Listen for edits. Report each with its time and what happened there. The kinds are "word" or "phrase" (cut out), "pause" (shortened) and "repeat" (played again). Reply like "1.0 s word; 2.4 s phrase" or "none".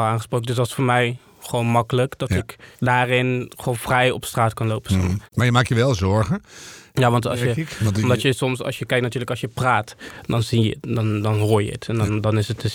2.7 s pause; 5.2 s pause